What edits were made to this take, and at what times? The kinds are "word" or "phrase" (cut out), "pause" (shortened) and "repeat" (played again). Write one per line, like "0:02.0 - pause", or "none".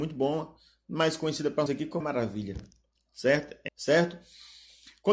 0:01.7 - word
0:02.0 - word
0:03.7 - phrase